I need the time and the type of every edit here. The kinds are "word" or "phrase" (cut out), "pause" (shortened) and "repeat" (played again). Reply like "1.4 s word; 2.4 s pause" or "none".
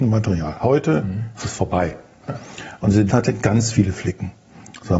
3.1 s word